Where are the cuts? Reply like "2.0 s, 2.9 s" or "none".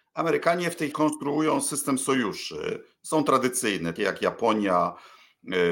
0.9 s, 4.0 s